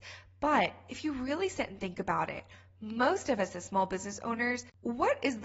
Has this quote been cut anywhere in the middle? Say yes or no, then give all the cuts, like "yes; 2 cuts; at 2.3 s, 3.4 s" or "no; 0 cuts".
no; 0 cuts